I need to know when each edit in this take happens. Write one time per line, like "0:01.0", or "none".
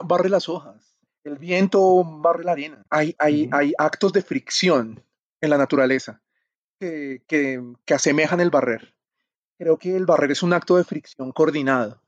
0:01.1
0:02.9